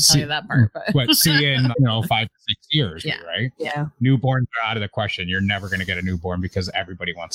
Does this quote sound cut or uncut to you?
cut